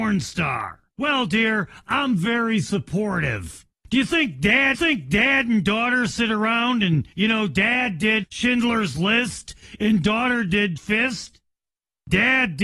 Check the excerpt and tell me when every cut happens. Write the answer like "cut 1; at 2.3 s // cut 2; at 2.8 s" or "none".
cut 1; at 0.9 s // cut 2; at 3.7 s // cut 3; at 4.7 s // cut 4; at 7.1 s // cut 5; at 8.2 s // cut 6; at 10.8 s